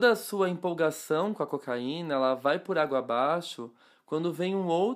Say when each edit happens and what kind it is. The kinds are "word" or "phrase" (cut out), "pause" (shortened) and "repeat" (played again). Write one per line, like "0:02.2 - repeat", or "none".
none